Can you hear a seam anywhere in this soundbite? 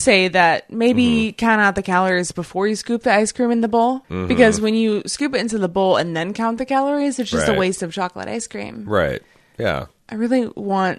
yes; 1 cut; at 4.0 s

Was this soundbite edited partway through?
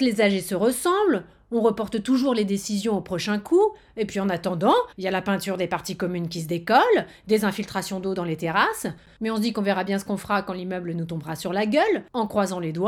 yes; 1 cut; at 4.9 s

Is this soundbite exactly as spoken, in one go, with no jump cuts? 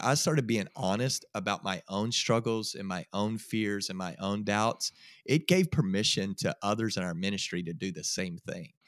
yes; 0 cuts

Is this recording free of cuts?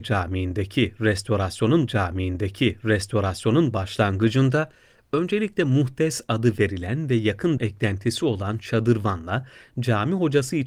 no; 2 cuts; at 1.9 s, 7.6 s

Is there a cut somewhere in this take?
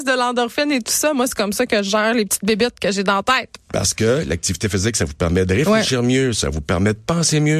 no; 0 cuts

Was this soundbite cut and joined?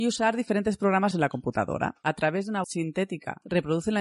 yes; 2 cuts; at 1.1 s, 2.6 s

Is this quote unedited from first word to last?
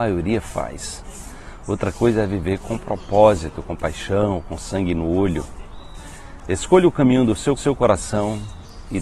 no; 1 cut; at 7.6 s

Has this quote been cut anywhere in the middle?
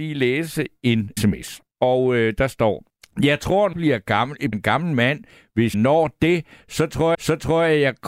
yes; 7 cuts; at 1.2 s, 1.7 s, 2.9 s, 3.7 s, 4.5 s, 5.7 s, 7.1 s

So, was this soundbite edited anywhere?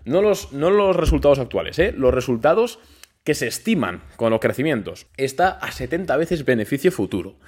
yes; 1 cut; at 5.1 s

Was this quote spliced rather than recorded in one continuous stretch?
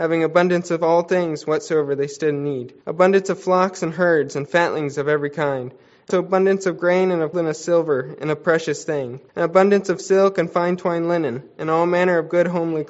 yes; 4 cuts; at 2.8 s, 6.1 s, 7.3 s, 9.3 s

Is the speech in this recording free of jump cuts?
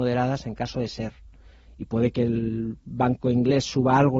yes; 0 cuts

